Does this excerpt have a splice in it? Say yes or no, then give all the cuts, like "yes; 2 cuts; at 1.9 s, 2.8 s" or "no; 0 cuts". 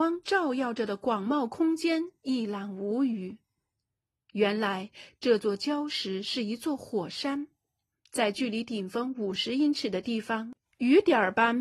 no; 0 cuts